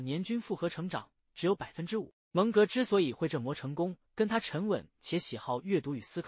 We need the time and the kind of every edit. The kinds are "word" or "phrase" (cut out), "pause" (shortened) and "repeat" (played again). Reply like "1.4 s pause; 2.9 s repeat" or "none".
2.2 s pause; 4.1 s pause